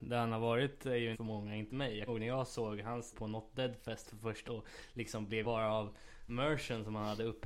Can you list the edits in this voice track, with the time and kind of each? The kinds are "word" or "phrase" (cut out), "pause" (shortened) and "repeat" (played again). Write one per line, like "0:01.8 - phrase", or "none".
0:01.1 - word
0:01.7 - word
0:02.1 - word
0:03.1 - word
0:04.4 - word
0:05.4 - word
0:06.3 - word